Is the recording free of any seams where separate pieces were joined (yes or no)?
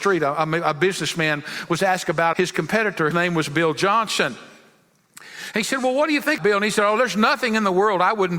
no